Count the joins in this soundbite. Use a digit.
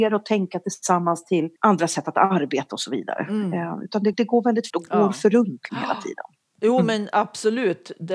4